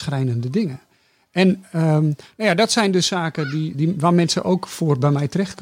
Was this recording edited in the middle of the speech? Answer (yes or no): yes